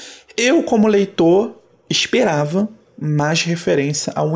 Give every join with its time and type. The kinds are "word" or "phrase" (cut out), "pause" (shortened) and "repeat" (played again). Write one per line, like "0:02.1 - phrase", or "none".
none

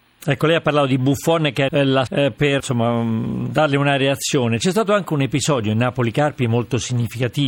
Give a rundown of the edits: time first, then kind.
0:01.7 - word
0:02.1 - word
0:02.6 - word

